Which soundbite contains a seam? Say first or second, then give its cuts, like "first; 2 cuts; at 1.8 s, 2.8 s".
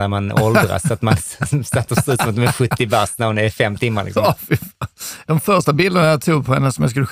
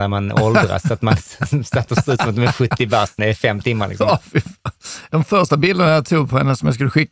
second; 1 cut; at 3.2 s